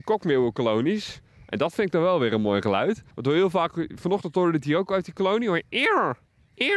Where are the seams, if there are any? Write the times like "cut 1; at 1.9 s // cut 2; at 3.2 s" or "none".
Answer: cut 1; at 3.1 s